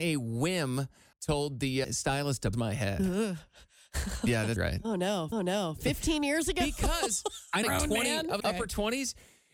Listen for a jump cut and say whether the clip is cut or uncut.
cut